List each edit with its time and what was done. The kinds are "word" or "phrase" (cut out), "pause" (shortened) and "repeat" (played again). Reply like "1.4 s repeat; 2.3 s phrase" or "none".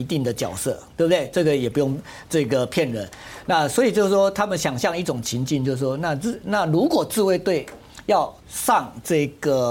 8.4 s pause

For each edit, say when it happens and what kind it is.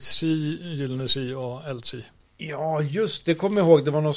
none

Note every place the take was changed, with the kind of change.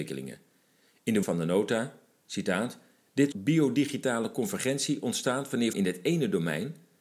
1.2 s word; 3.3 s word; 5.7 s word

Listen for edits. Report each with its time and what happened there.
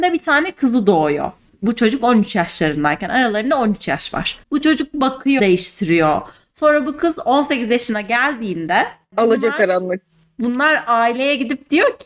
1.4 s pause; 4.4 s pause; 5.4 s phrase

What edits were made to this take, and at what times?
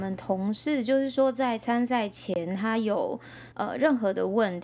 3.5 s pause

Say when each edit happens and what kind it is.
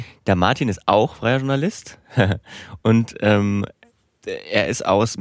none

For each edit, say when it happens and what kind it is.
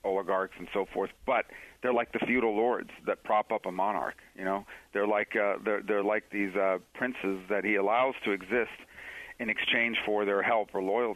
none

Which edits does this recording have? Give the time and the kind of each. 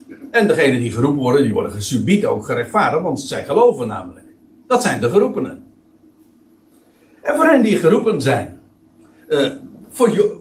none

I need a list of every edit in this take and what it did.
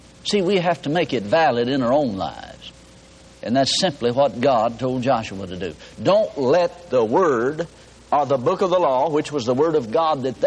none

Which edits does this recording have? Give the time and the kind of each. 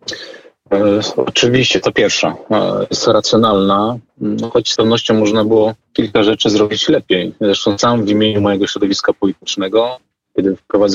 4.8 s phrase; 5.8 s pause

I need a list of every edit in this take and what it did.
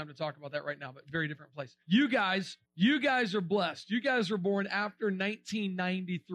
1.8 s pause; 2.6 s pause

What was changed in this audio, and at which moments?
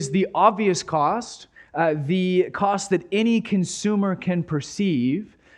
none

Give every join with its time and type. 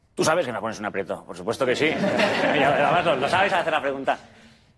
none

